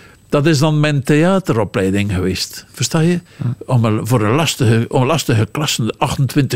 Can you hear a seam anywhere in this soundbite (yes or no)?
yes